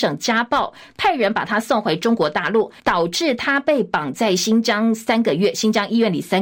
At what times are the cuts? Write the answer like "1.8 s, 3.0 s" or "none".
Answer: 2.8 s